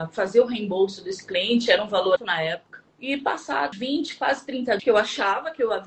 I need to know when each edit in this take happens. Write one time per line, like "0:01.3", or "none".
0:02.2
0:02.9
0:03.7
0:04.8